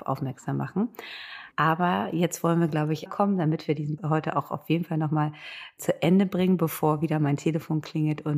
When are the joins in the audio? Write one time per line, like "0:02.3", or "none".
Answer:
0:01.5
0:03.1
0:04.0
0:05.8